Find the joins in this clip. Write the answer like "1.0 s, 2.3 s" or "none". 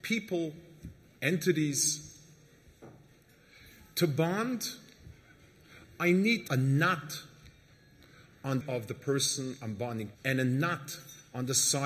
6.5 s, 8.6 s, 10.1 s